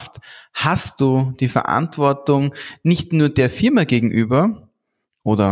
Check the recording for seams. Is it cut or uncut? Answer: uncut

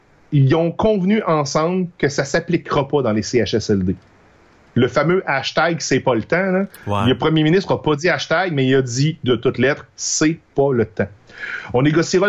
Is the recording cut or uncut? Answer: uncut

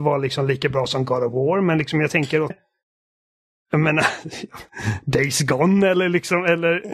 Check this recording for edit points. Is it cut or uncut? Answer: cut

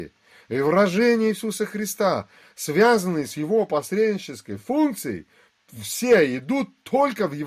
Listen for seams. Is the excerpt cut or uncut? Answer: uncut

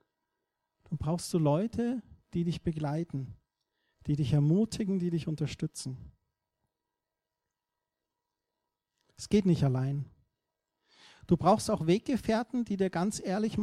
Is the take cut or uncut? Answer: uncut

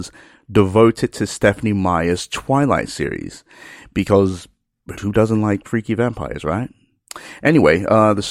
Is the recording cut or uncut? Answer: cut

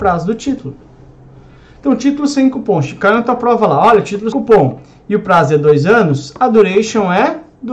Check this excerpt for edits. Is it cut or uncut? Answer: cut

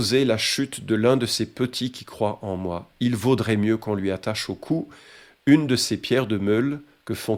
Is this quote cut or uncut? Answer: uncut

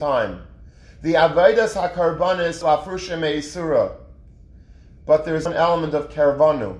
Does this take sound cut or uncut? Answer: cut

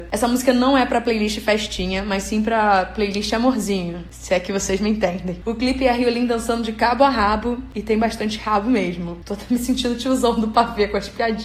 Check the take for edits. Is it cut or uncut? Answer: uncut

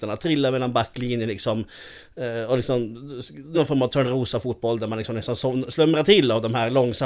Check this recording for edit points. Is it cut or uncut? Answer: cut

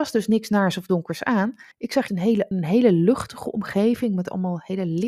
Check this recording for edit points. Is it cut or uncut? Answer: cut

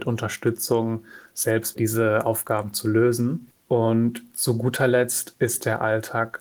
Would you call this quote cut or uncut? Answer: cut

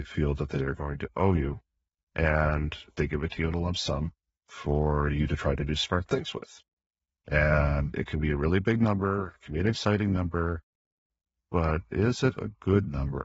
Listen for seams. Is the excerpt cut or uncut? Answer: uncut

